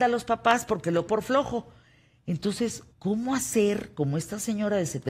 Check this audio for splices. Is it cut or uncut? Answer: cut